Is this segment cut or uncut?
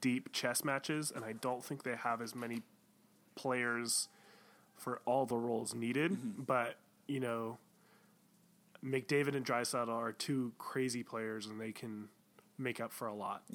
uncut